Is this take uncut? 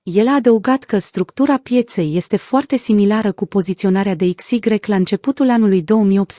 yes; 0 cuts

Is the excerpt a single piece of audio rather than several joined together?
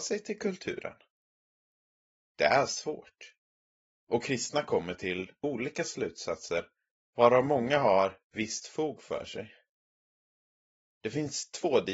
yes; 0 cuts

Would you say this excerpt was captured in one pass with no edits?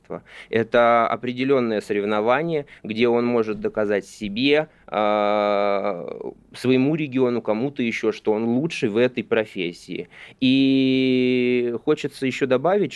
yes; 0 cuts

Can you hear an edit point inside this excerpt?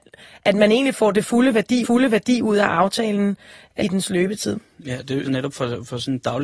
yes; 3 cuts; at 1.8 s, 3.8 s, 5.2 s

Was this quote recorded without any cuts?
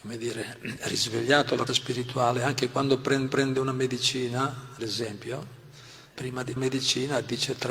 no; 5 cuts; at 1.7 s, 3.3 s, 4.8 s, 6.1 s, 6.6 s

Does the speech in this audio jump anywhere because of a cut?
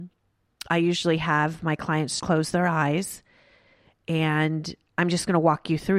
yes; 2 cuts; at 2.2 s, 4.9 s

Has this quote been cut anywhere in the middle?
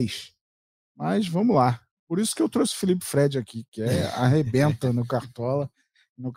no; 0 cuts

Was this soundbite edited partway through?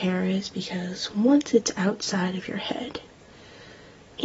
no; 0 cuts

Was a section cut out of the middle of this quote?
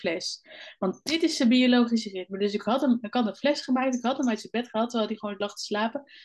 no; 0 cuts

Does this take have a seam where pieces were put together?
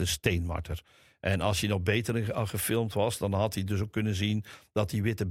no; 0 cuts

